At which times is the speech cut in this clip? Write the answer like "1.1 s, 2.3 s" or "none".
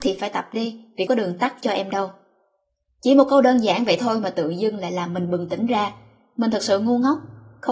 1.1 s